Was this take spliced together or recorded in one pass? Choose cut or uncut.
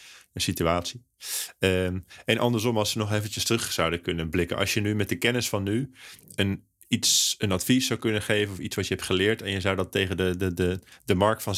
uncut